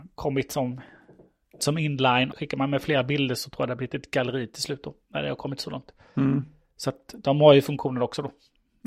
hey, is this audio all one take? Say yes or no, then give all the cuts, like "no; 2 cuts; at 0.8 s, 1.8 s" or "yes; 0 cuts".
no; 2 cuts; at 1.6 s, 2.3 s